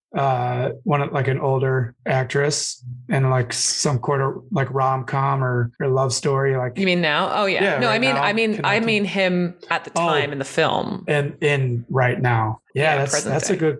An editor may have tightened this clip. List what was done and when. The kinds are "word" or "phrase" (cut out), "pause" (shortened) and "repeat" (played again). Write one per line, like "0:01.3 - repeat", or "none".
0:02.0 - pause